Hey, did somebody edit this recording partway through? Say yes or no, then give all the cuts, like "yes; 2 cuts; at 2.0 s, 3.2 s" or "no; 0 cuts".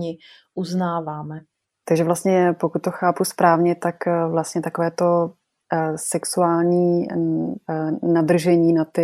no; 0 cuts